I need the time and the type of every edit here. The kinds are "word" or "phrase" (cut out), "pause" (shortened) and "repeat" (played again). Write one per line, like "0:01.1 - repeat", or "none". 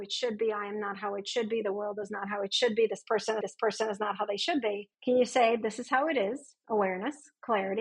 0:03.4 - repeat
0:04.9 - pause